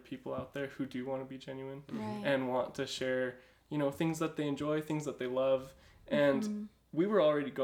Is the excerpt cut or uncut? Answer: uncut